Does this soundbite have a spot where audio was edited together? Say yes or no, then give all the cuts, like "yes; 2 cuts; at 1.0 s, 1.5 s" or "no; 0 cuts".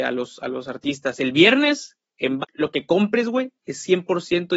yes; 1 cut; at 2.4 s